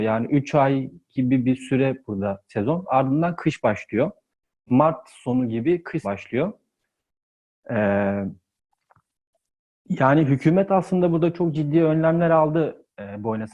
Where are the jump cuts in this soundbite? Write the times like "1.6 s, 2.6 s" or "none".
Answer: 6.0 s

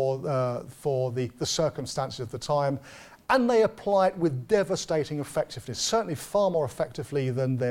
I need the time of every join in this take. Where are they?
none

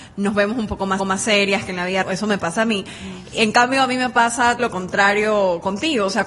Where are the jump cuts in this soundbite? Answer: 1.0 s, 2.0 s, 4.6 s

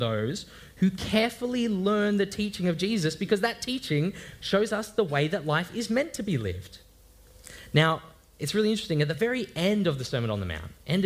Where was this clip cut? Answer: none

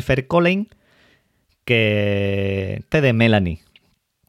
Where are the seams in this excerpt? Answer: 2.9 s

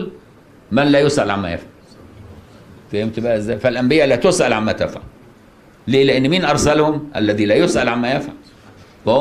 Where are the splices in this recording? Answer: none

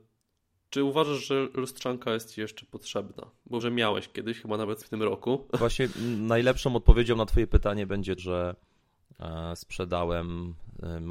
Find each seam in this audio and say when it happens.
3.6 s, 4.8 s, 8.2 s

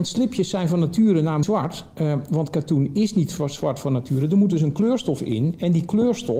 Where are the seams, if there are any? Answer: 1.4 s

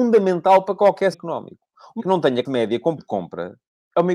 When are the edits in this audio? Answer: 1.1 s, 2.0 s, 2.5 s, 3.0 s

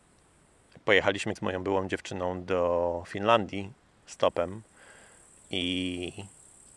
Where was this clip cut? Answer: 1.4 s

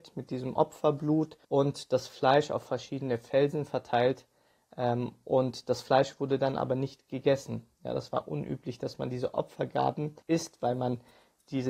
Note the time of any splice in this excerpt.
1.4 s, 10.2 s

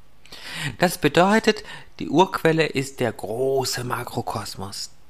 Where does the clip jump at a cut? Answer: none

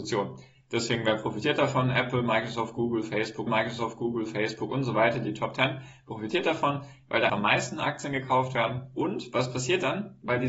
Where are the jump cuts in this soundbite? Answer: 3.5 s, 7.3 s

